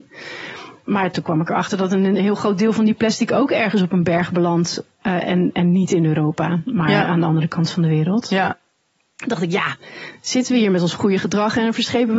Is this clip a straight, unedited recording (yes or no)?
yes